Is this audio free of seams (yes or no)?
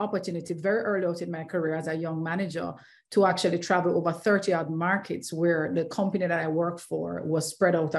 yes